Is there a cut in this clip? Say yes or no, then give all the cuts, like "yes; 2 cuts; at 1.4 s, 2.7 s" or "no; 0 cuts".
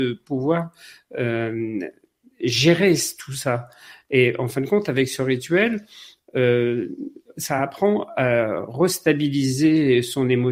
no; 0 cuts